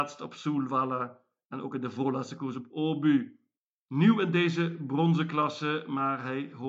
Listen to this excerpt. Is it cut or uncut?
uncut